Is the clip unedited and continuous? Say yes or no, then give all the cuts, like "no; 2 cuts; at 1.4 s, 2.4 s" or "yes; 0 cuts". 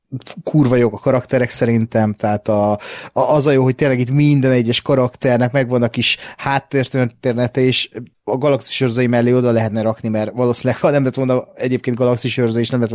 no; 1 cut; at 8.1 s